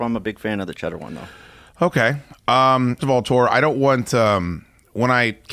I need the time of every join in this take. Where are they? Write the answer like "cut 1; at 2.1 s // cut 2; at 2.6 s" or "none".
cut 1; at 3.0 s